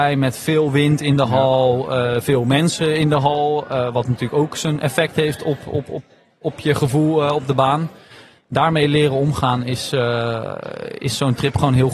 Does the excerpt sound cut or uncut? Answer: uncut